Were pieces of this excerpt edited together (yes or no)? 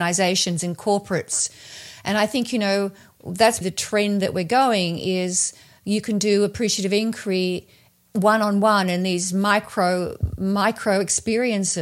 yes